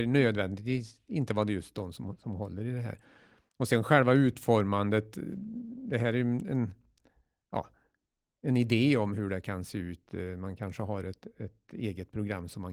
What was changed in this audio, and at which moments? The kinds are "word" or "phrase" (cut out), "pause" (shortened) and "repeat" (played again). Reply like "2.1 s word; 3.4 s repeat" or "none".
none